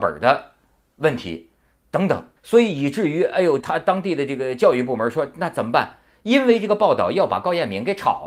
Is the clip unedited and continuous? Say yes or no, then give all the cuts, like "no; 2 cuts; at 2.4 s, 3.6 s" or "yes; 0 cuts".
no; 2 cuts; at 2.4 s, 3.6 s